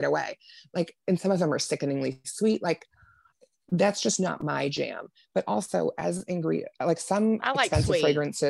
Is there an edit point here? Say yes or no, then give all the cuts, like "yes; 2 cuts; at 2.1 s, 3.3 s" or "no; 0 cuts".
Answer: no; 0 cuts